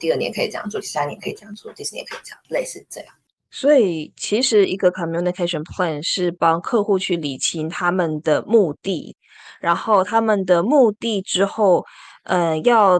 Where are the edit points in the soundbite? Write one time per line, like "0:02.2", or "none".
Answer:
none